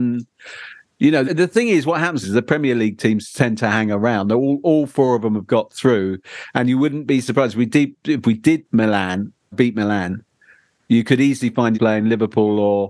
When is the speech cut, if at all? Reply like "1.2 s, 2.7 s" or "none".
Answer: 1.2 s, 2.2 s, 8.6 s, 9.5 s, 11.7 s